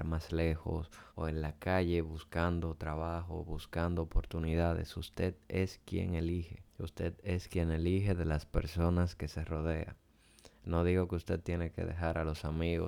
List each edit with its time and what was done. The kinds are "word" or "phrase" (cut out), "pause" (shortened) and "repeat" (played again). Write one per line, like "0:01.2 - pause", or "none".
0:01.1 - pause
0:06.7 - pause